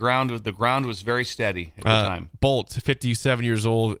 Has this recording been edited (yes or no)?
no